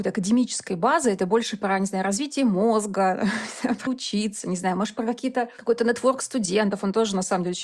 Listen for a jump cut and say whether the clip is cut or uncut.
cut